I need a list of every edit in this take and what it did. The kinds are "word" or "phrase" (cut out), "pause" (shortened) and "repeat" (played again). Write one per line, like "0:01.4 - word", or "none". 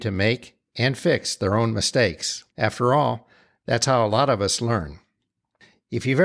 0:02.5 - pause